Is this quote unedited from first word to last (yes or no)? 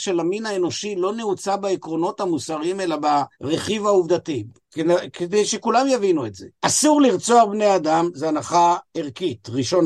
no